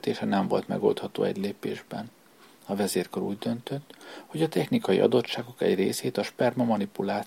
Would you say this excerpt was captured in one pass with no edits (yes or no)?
yes